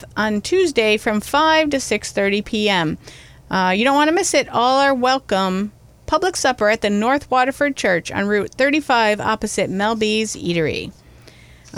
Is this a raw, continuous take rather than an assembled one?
yes; 0 cuts

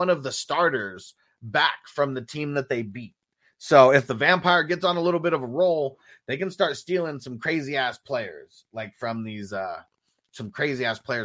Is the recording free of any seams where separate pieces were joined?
yes; 0 cuts

